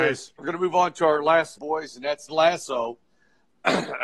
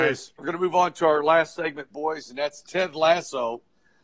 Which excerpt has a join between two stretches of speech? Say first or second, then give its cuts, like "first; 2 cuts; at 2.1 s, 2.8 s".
first; 2 cuts; at 1.5 s, 2.3 s